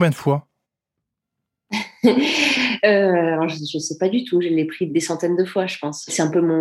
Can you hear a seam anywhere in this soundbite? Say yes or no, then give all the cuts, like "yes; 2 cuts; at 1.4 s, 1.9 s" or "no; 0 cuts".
yes; 1 cut; at 4.9 s